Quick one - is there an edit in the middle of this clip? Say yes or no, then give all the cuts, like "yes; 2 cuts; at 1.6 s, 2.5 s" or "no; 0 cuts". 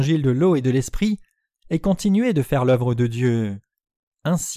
no; 0 cuts